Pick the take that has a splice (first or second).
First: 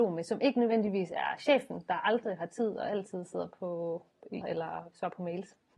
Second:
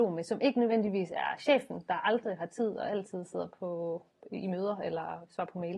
first